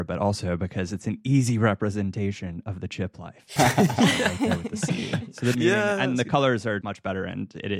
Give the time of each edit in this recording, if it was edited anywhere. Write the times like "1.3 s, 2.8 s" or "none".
3.6 s, 5.5 s, 6.8 s